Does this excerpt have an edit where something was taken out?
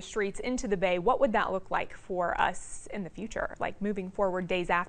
no; 0 cuts

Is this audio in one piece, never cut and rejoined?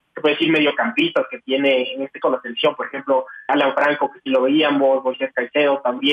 no; 2 cuts; at 2.2 s, 3.5 s

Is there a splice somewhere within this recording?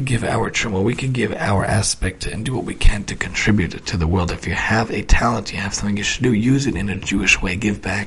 no; 0 cuts

